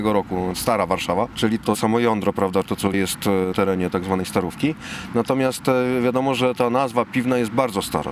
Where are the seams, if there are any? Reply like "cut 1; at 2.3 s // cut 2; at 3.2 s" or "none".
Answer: cut 1; at 2.9 s // cut 2; at 3.5 s